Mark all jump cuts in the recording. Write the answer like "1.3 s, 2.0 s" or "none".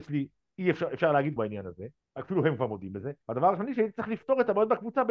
1.4 s, 2.0 s, 3.2 s